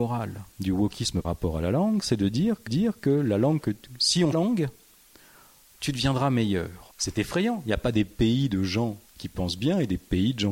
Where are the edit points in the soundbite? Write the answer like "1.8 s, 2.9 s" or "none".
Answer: 1.2 s, 2.7 s, 4.3 s, 6.9 s, 9.1 s